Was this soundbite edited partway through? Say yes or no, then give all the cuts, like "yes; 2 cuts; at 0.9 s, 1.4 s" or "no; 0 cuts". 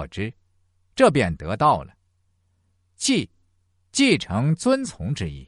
no; 0 cuts